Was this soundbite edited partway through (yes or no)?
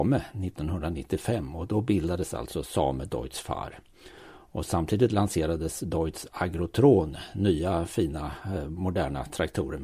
no